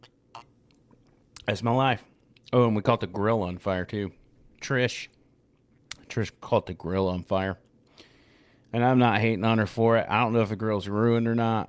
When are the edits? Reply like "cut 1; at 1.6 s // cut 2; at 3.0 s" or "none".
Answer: none